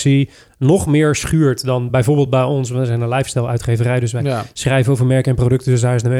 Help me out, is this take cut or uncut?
uncut